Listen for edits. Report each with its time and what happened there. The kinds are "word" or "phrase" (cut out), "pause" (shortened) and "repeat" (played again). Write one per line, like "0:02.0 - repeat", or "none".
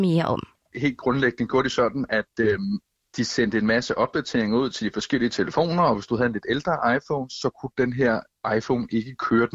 none